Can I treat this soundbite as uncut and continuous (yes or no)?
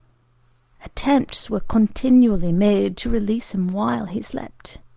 yes